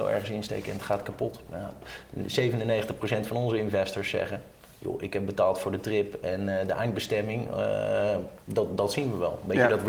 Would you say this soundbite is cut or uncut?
cut